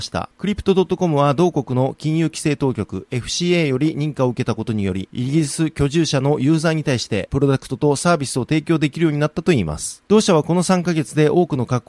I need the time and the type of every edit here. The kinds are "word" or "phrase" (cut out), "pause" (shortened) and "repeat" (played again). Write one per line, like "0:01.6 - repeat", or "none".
none

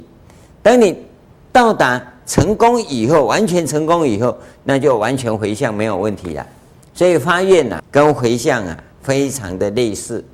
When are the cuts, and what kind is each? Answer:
0:06.7 - pause
0:07.8 - word
0:08.9 - pause

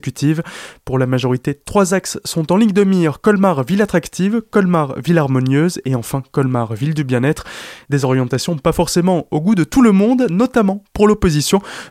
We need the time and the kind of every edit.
none

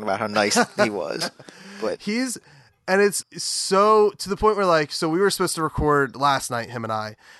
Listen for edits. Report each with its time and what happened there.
0:03.2 - word

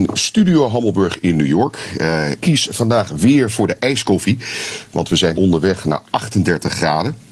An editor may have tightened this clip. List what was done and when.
0:02.4 - word
0:05.4 - word

